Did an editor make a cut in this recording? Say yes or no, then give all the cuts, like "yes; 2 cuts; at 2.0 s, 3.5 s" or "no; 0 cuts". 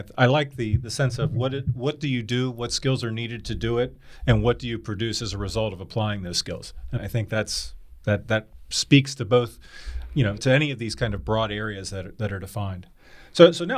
yes; 2 cuts; at 7.0 s, 10.4 s